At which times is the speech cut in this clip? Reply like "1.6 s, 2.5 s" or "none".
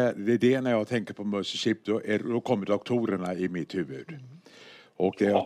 none